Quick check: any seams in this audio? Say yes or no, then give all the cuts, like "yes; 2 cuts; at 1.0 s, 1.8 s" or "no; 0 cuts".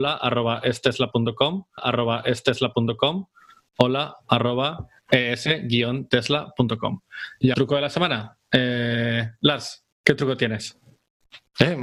yes; 3 cuts; at 1.8 s, 7.5 s, 9.9 s